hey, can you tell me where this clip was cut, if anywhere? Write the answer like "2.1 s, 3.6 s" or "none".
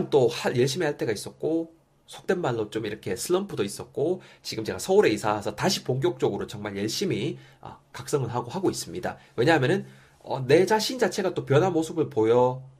7.8 s